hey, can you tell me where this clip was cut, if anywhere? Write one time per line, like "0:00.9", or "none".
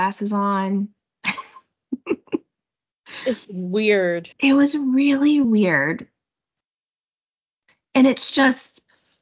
0:03.4
0:04.3
0:05.4